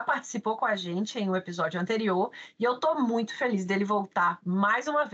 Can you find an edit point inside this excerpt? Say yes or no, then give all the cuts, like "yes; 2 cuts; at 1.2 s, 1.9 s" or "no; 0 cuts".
no; 0 cuts